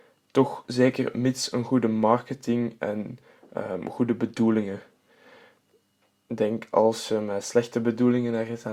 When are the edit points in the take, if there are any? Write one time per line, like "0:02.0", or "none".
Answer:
none

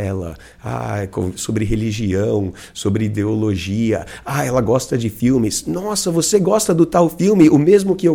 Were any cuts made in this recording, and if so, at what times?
none

